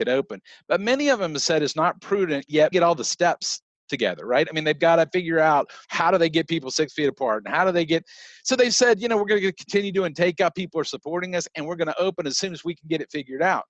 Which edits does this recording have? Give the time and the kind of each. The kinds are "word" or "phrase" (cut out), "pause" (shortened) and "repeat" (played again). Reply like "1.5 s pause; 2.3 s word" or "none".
2.7 s phrase; 5.8 s pause